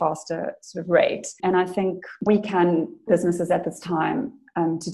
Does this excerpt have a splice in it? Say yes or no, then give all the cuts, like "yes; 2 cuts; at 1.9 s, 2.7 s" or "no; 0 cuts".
yes; 3 cuts; at 1.4 s, 2.3 s, 3.1 s